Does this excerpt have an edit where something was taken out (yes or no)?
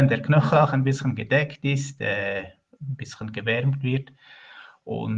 no